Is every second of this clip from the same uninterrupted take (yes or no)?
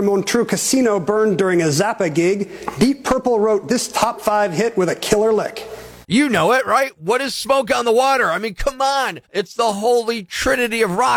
no